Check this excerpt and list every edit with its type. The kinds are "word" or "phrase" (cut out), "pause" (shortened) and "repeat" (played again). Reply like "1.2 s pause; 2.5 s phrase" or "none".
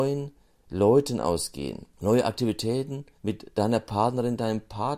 1.9 s pause; 3.2 s pause